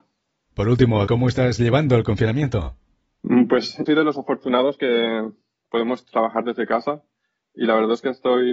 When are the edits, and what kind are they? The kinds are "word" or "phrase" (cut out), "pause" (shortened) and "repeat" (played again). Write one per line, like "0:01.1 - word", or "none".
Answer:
0:01.1 - word
0:03.9 - word